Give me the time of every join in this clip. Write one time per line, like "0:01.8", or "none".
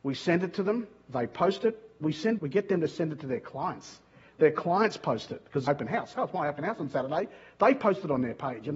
0:02.4
0:05.7